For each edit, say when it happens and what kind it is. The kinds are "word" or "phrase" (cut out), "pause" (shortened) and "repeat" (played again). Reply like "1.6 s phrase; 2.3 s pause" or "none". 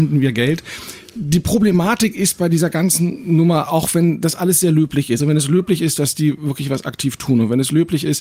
5.2 s word